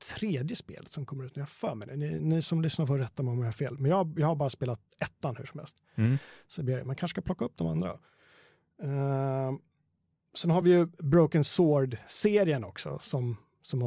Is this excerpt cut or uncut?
uncut